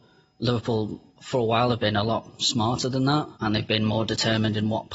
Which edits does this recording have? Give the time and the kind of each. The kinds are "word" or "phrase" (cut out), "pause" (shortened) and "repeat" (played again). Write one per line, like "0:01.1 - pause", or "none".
0:01.1 - pause
0:03.3 - pause